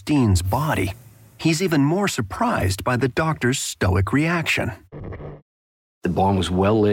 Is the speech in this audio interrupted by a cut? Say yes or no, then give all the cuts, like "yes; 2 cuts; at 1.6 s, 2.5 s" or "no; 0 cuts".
no; 0 cuts